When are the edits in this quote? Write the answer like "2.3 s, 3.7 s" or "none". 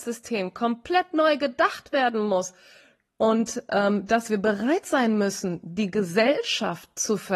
none